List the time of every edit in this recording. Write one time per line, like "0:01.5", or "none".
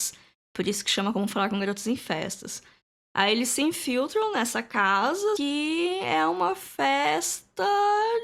0:05.4